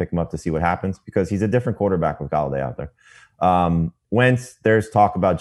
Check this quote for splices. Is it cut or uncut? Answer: uncut